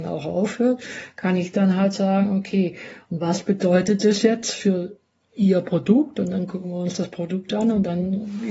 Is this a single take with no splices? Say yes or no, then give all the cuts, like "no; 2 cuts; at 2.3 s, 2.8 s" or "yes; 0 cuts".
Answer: yes; 0 cuts